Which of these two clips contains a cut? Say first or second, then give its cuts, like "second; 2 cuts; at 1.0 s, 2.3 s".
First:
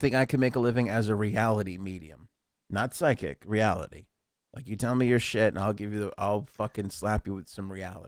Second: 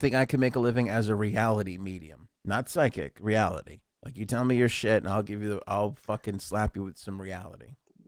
second; 2 cuts; at 2.4 s, 3.9 s